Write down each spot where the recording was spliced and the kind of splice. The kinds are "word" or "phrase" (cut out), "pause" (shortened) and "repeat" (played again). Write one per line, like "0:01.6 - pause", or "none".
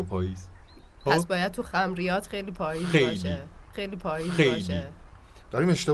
0:03.7 - repeat